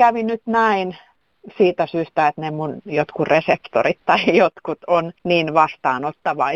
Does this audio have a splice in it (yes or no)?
yes